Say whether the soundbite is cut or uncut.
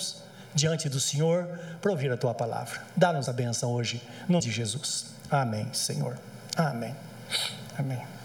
cut